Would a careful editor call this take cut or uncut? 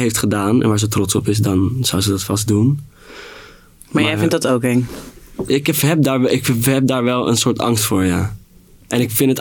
uncut